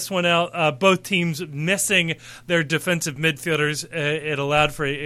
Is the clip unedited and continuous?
yes; 0 cuts

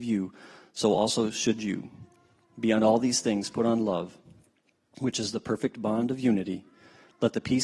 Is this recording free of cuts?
yes; 0 cuts

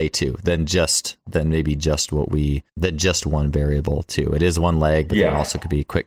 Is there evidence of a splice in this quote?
yes; 1 cut; at 2.7 s

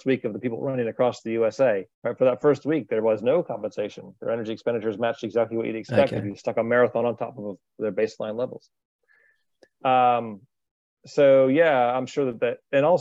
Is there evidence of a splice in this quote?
yes; 1 cut; at 1.9 s

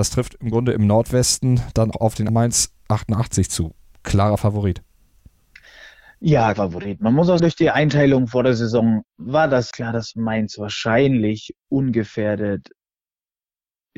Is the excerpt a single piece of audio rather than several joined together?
no; 6 cuts; at 1.9 s, 2.3 s, 6.5 s, 7.4 s, 9.0 s, 9.7 s

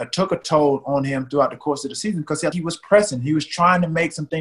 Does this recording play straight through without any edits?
no; 1 cut; at 2.5 s

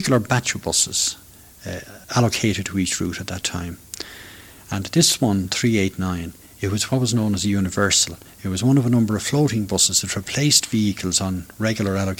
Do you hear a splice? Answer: yes; 1 cut; at 2.0 s

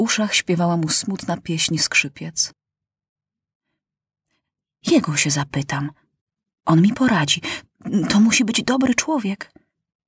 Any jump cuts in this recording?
no; 0 cuts

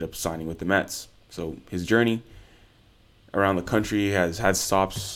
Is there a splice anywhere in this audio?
no; 0 cuts

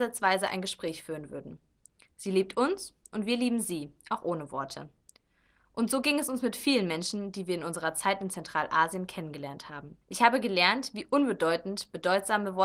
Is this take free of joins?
no; 1 cut; at 10.0 s

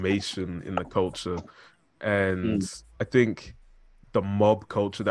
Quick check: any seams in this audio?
no; 0 cuts

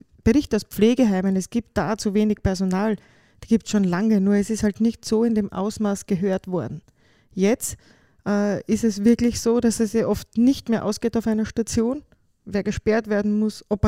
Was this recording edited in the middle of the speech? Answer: no; 0 cuts

